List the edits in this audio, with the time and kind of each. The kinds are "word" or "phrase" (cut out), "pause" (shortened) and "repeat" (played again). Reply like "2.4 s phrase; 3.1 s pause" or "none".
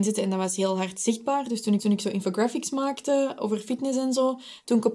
1.8 s repeat